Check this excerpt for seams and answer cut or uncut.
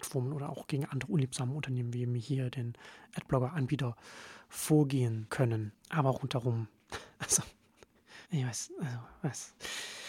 cut